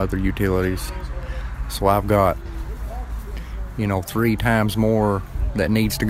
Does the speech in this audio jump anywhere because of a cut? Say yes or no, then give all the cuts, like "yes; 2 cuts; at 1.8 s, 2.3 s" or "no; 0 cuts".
no; 0 cuts